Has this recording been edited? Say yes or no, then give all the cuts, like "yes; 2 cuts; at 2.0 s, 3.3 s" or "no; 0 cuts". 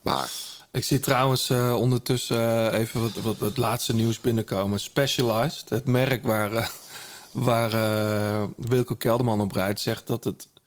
no; 0 cuts